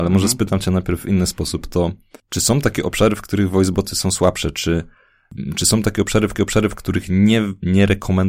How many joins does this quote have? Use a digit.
2